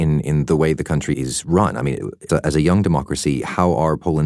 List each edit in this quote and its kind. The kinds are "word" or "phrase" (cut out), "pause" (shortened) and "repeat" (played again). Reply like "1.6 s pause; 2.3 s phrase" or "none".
1.1 s word; 2.3 s word